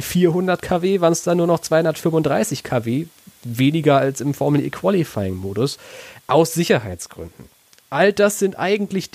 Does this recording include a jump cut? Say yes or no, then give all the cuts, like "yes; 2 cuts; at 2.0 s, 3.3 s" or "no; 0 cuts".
no; 0 cuts